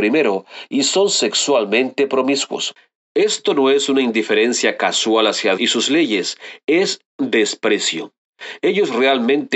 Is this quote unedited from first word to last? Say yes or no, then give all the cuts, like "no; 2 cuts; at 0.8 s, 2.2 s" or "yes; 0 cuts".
no; 1 cut; at 5.6 s